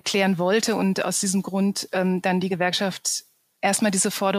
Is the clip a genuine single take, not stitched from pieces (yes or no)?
yes